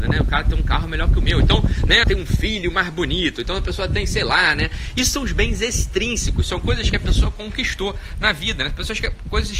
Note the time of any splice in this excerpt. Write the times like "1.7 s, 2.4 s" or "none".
2.0 s